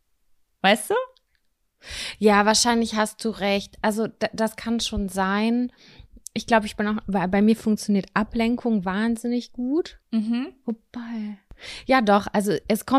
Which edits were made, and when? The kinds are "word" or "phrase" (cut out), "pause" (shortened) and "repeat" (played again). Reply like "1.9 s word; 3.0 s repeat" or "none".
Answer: 10.0 s pause